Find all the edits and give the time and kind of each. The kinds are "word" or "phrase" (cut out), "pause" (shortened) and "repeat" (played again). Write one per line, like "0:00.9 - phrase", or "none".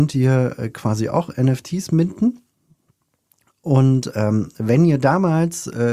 none